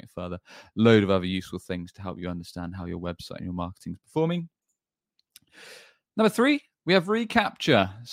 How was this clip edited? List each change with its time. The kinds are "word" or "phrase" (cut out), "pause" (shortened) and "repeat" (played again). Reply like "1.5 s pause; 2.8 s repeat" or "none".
none